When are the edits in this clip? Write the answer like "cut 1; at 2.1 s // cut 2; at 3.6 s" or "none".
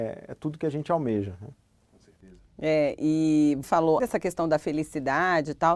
cut 1; at 3.6 s // cut 2; at 4.0 s